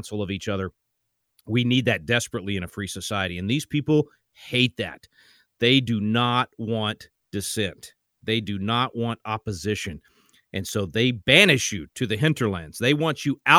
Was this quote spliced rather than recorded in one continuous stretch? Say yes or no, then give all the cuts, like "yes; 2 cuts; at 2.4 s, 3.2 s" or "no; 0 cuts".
no; 0 cuts